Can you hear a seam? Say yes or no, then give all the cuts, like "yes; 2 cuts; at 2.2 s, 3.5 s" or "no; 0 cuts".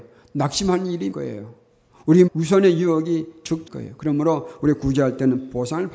yes; 3 cuts; at 1.1 s, 2.3 s, 3.7 s